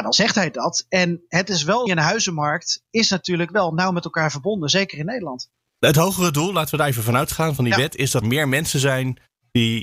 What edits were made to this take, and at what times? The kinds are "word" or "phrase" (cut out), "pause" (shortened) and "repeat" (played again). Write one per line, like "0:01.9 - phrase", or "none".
0:01.9 - phrase
0:05.5 - pause
0:08.2 - word